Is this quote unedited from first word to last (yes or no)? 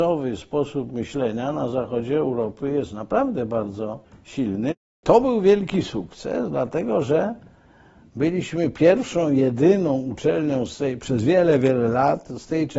no